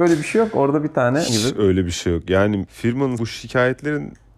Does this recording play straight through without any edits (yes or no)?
no